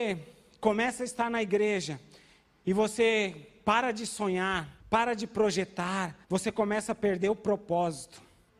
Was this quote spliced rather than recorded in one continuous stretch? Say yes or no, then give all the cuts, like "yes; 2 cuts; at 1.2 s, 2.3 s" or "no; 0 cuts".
yes; 2 cuts; at 4.8 s, 6.2 s